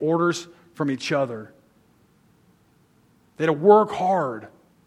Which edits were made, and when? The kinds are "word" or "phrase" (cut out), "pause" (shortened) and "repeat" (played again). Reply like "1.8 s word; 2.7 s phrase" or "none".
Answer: none